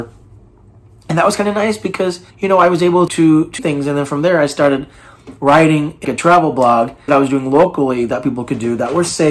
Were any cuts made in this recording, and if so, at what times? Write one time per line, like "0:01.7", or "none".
0:02.3
0:03.1
0:03.6
0:06.0
0:07.1